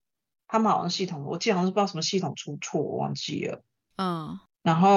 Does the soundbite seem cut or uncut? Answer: uncut